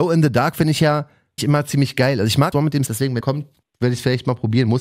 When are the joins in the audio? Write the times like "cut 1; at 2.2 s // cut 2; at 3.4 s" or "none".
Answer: cut 1; at 1.4 s // cut 2; at 2.5 s // cut 3; at 2.9 s // cut 4; at 3.2 s // cut 5; at 3.6 s